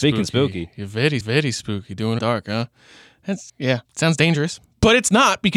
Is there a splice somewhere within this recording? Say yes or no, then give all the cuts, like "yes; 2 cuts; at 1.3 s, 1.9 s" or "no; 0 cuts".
yes; 4 cuts; at 1.2 s, 2.2 s, 3.5 s, 3.8 s